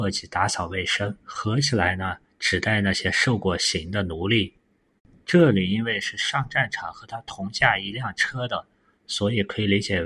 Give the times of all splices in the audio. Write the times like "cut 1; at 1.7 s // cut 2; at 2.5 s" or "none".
cut 1; at 1.2 s